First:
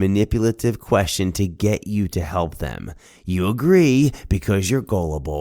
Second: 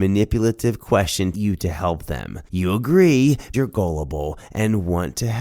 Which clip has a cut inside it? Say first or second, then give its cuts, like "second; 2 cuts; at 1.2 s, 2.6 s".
second; 3 cuts; at 1.3 s, 2.5 s, 3.5 s